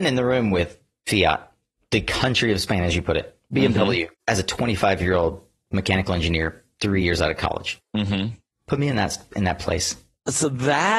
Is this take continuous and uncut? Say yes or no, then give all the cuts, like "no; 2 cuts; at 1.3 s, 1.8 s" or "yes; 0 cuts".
yes; 0 cuts